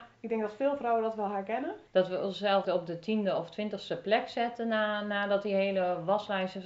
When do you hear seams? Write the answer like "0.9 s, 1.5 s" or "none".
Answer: 1.9 s, 2.6 s